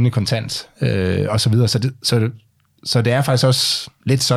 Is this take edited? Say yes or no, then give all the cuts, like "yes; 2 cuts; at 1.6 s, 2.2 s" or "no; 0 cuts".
no; 0 cuts